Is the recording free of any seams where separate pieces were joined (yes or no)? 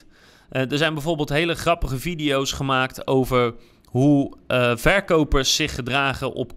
yes